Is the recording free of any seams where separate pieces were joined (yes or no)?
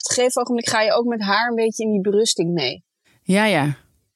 yes